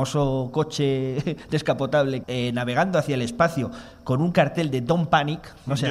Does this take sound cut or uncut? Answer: cut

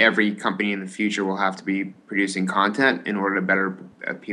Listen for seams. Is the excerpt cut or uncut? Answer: uncut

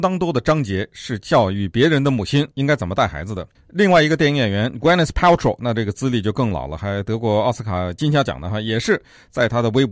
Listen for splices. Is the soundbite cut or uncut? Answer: cut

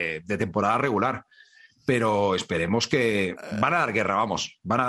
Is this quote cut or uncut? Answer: uncut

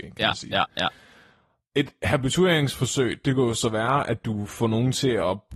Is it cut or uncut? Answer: uncut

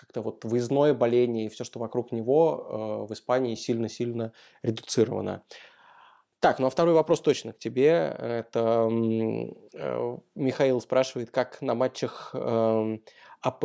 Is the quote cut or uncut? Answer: uncut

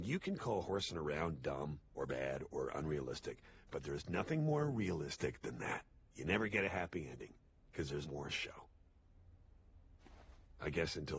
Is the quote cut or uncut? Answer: cut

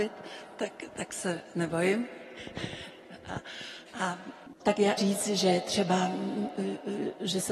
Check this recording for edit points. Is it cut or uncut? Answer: cut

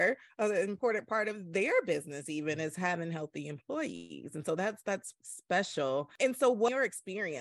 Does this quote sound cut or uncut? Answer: cut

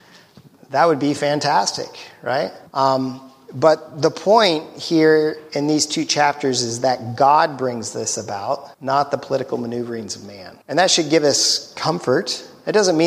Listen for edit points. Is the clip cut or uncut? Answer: cut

